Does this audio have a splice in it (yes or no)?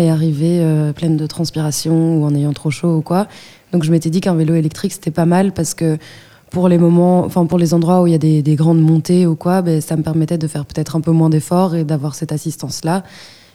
no